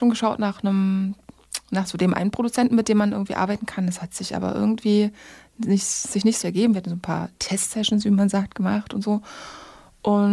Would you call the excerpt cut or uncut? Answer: cut